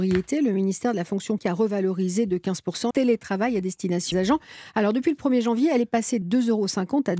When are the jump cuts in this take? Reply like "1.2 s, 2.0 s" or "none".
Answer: 1.4 s, 2.9 s, 4.1 s, 6.2 s